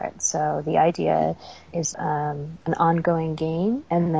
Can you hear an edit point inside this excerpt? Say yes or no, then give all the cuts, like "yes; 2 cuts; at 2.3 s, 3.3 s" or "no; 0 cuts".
yes; 1 cut; at 1.9 s